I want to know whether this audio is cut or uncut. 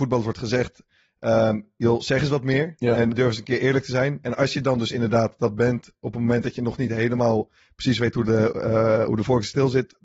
cut